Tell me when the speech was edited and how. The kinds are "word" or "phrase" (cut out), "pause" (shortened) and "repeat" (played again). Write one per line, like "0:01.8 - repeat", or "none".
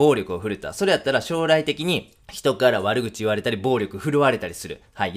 0:02.2 - pause